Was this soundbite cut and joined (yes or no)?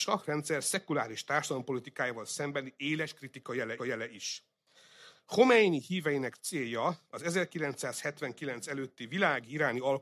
yes